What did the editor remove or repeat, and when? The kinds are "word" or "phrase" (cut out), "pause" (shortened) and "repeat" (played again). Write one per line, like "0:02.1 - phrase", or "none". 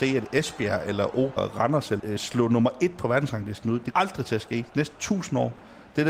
0:01.4 - word
0:02.0 - word
0:03.9 - word